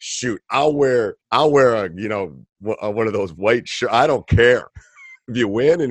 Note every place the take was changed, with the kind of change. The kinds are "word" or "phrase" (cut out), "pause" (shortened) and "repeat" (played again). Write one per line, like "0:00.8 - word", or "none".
0:01.2 - pause
0:04.7 - pause